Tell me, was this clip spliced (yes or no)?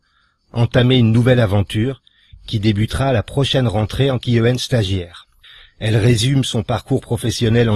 yes